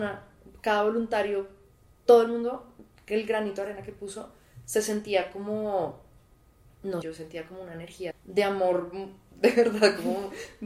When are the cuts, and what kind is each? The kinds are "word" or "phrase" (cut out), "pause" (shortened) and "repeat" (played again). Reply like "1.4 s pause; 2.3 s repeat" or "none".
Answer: 7.0 s word; 8.1 s word